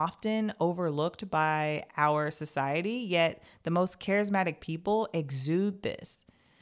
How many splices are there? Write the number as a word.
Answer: zero